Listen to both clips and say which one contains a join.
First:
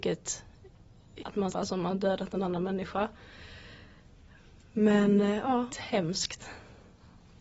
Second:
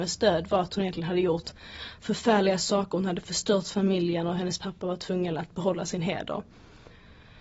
first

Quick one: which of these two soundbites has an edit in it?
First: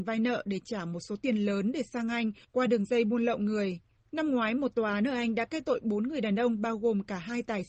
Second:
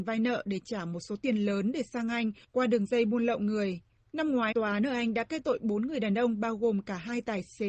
second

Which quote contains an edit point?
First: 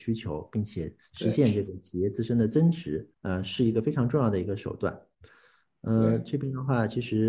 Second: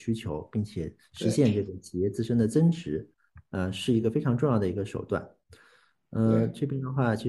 first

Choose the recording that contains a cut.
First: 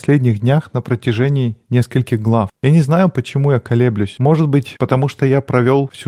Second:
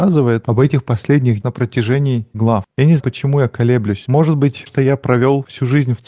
second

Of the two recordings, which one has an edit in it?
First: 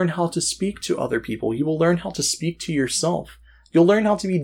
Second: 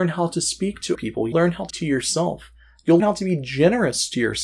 second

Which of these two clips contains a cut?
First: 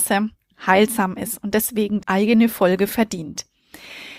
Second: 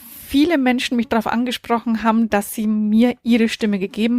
first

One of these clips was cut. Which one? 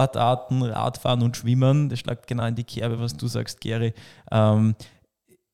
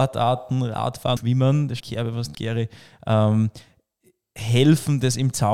second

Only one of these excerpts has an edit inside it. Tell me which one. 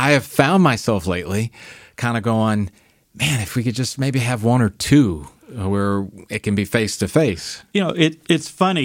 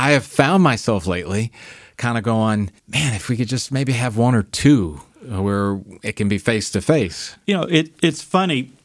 second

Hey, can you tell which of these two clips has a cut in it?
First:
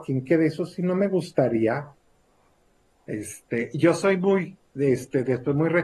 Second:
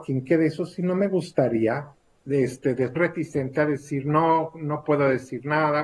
second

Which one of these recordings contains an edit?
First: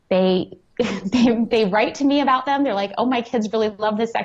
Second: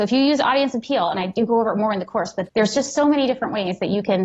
second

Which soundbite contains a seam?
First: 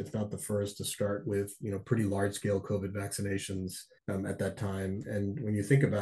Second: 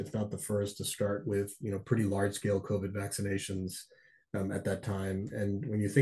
first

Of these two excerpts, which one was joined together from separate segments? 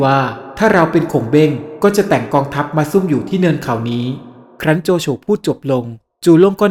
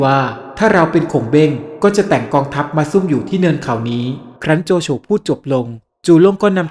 second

